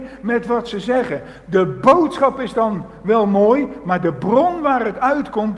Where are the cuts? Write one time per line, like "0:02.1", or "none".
none

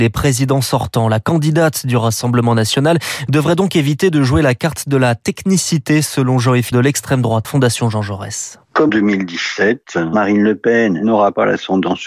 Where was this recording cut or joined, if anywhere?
0:06.7
0:07.4
0:08.9

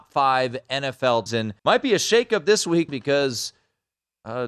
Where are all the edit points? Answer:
0:01.3
0:01.6
0:02.9

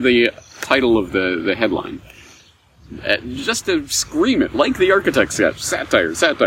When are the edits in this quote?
none

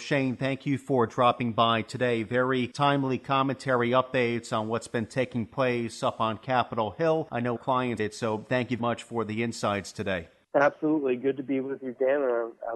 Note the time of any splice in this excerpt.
0:07.6
0:08.0
0:08.8

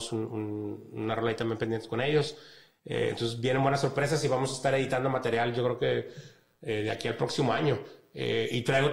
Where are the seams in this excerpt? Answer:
none

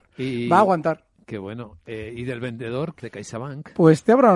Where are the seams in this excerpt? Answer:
0:03.0

